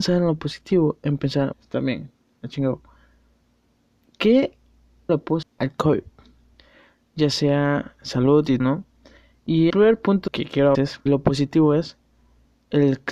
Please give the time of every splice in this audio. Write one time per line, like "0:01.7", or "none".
0:01.5
0:05.1
0:05.4
0:08.6
0:09.7
0:10.3
0:10.7
0:11.1

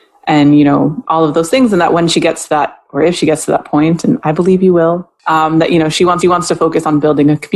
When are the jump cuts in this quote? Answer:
0:06.2

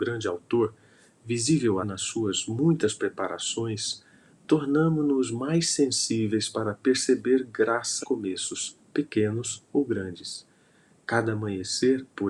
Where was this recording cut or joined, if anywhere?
0:01.8
0:08.0

